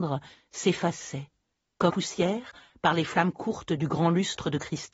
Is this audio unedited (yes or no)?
no